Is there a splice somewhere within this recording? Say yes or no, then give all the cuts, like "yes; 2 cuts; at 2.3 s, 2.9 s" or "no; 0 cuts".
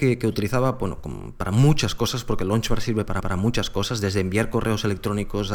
yes; 1 cut; at 3.2 s